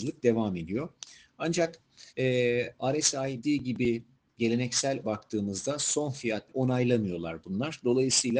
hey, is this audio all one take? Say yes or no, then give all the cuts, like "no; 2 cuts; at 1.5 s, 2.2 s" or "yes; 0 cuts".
no; 4 cuts; at 2.1 s, 3.4 s, 5.0 s, 6.5 s